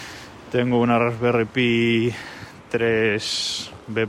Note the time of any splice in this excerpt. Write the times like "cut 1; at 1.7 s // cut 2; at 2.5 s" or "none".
none

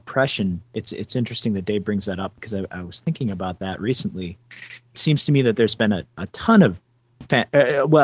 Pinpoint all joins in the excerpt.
cut 1; at 4.9 s

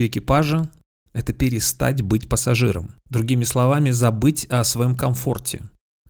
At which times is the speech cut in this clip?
none

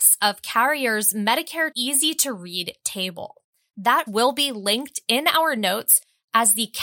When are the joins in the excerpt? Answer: cut 1; at 1.7 s // cut 2; at 4.1 s

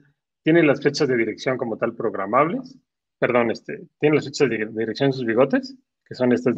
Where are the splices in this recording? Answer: none

